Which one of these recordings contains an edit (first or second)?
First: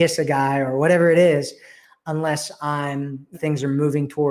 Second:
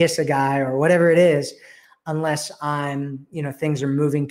first